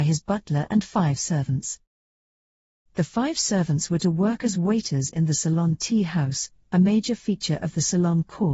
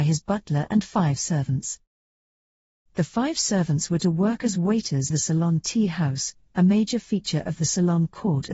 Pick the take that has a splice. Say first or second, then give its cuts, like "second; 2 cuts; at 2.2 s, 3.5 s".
second; 1 cut; at 5.1 s